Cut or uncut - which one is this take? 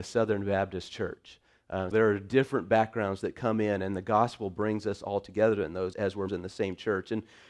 cut